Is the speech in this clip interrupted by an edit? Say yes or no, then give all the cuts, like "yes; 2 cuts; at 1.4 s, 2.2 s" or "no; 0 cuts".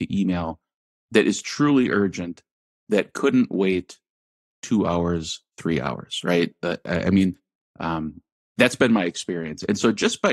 no; 0 cuts